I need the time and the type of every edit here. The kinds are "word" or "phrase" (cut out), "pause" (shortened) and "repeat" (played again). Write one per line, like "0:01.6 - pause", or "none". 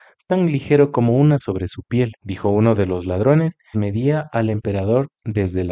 0:01.4 - word
0:02.2 - pause
0:03.7 - word